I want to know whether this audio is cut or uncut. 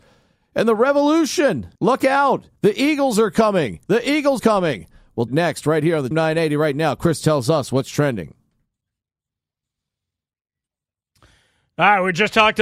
cut